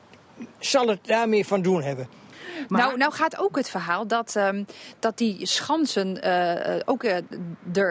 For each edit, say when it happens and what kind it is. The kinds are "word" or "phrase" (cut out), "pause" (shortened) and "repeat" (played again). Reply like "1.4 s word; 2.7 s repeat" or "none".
none